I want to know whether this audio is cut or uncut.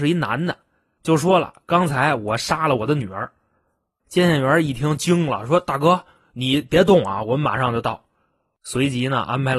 uncut